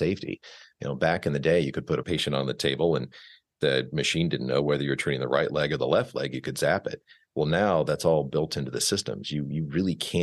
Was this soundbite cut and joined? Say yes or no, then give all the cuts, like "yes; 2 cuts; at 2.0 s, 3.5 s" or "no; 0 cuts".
no; 0 cuts